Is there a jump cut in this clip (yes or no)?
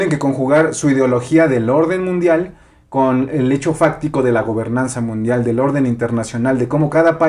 no